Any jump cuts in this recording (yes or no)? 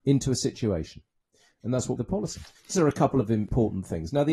yes